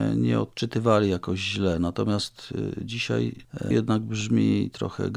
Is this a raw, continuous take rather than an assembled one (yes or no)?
no